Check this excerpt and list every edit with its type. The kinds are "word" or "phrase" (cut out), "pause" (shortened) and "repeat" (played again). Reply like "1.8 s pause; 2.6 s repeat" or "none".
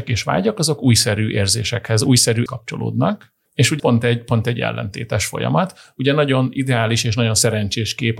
2.5 s word; 3.5 s pause; 3.8 s word